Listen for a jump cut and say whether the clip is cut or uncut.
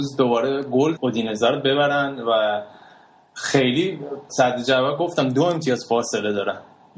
cut